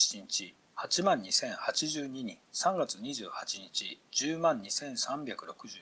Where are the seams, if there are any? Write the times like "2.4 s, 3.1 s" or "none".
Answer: 2.4 s, 4.0 s